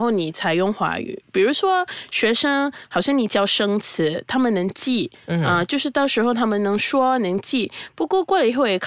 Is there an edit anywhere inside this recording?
yes; 1 cut; at 5.1 s

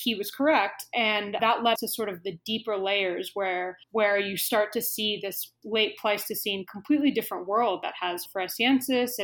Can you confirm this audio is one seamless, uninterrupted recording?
no; 4 cuts; at 1.4 s, 1.8 s, 3.8 s, 8.3 s

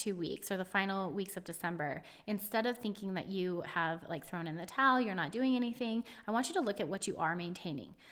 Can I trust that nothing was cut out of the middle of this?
yes; 0 cuts

